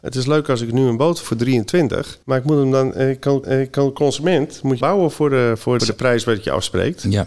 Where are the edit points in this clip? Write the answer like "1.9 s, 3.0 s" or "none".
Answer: 1.2 s, 2.2 s, 3.4 s, 4.8 s, 5.8 s